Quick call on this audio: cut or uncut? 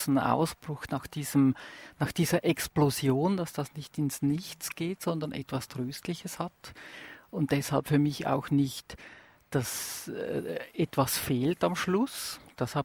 uncut